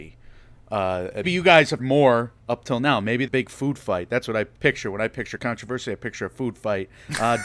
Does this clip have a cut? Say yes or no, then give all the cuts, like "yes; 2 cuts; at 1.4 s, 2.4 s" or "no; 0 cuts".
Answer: yes; 6 cuts; at 1.2 s, 1.8 s, 2.4 s, 3.3 s, 4.5 s, 5.4 s